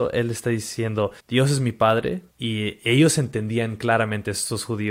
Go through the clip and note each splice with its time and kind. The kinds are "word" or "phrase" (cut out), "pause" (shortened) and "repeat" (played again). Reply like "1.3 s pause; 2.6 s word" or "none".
1.2 s pause; 2.3 s pause